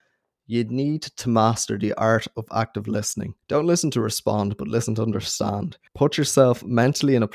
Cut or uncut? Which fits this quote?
cut